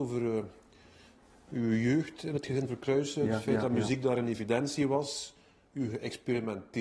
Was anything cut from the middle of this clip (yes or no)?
no